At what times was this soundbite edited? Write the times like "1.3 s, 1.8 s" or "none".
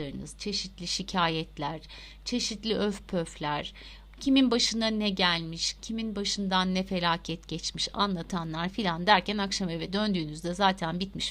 none